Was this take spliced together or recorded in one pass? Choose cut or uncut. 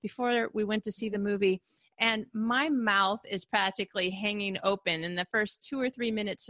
uncut